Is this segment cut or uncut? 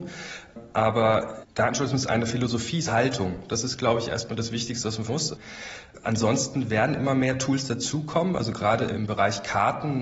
cut